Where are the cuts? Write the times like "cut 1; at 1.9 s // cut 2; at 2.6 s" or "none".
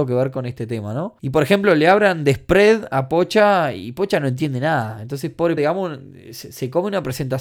cut 1; at 1.2 s // cut 2; at 5.6 s